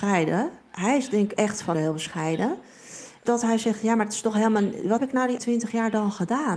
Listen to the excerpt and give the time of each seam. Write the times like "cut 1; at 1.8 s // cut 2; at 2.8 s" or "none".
cut 1; at 1.4 s // cut 2; at 1.7 s // cut 3; at 3.2 s // cut 4; at 5.0 s // cut 5; at 5.4 s

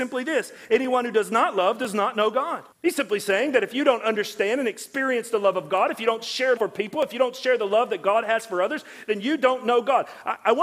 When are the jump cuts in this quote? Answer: cut 1; at 2.7 s // cut 2; at 6.6 s

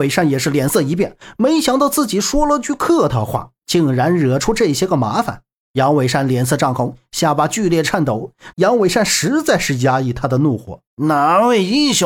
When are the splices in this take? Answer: cut 1; at 5.6 s // cut 2; at 8.5 s // cut 3; at 10.9 s

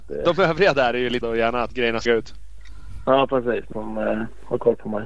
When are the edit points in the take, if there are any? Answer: cut 1; at 1.2 s // cut 2; at 2.1 s // cut 3; at 3.7 s

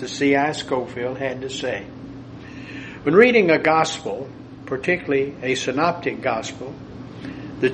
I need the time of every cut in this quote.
none

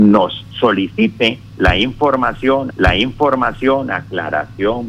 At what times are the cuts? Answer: cut 1; at 2.7 s

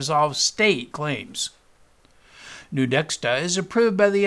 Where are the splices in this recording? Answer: cut 1; at 0.9 s

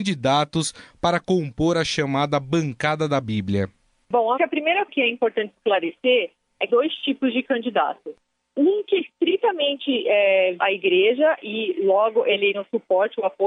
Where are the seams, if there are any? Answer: cut 1; at 4.4 s // cut 2; at 4.9 s // cut 3; at 6.7 s // cut 4; at 9.0 s // cut 5; at 10.6 s // cut 6; at 12.5 s

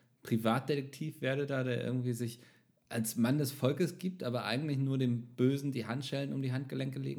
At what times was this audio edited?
none

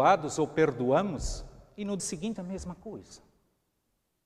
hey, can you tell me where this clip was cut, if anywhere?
cut 1; at 2.0 s // cut 2; at 2.4 s

